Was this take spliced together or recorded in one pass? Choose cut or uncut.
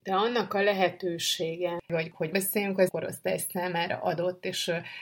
cut